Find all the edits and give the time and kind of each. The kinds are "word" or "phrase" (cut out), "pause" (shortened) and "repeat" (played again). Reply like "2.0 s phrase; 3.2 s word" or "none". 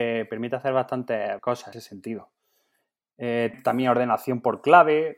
1.4 s word; 1.7 s phrase; 3.5 s word

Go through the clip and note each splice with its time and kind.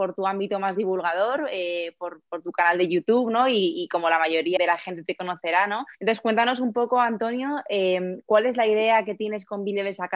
4.6 s word; 5.9 s pause

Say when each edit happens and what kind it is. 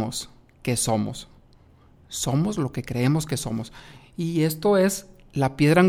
none

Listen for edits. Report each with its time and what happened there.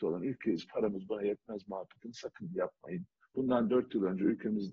3.2 s pause

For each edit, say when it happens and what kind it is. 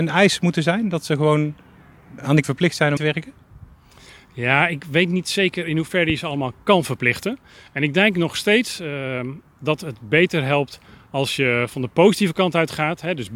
2.4 s word; 3.0 s word

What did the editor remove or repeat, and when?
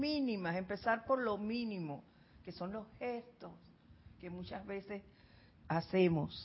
none

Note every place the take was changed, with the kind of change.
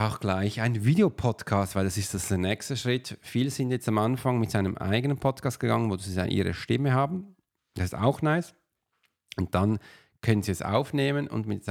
none

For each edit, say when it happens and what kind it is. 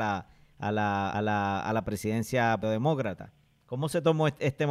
1.1 s repeat; 2.6 s phrase

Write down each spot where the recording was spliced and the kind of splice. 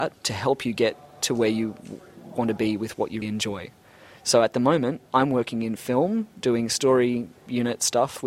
3.2 s word; 5.1 s pause

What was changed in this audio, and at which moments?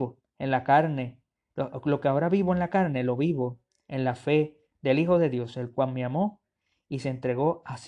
none

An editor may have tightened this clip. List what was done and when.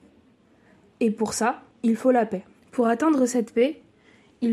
1.7 s pause; 2.6 s pause

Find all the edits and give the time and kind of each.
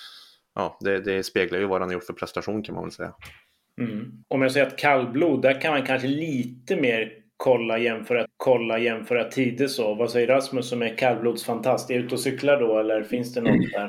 4.2 s pause; 8.2 s repeat

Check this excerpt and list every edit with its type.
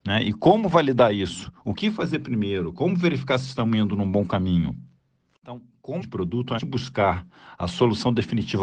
6.0 s word; 6.6 s word

